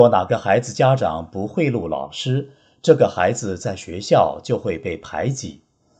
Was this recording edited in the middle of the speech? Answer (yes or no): no